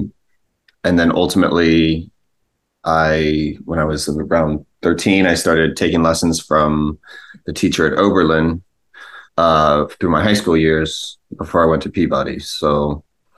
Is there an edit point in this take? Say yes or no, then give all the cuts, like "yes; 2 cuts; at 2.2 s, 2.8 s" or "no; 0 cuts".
yes; 2 cuts; at 4.7 s, 9.3 s